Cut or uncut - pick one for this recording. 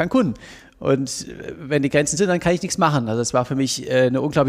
cut